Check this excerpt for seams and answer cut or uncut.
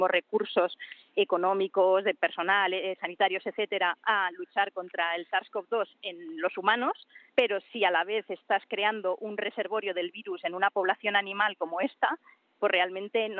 cut